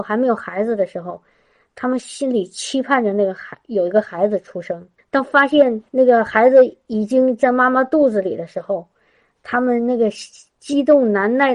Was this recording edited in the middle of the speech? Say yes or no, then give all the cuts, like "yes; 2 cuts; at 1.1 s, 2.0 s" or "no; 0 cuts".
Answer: yes; 2 cuts; at 5.0 s, 5.9 s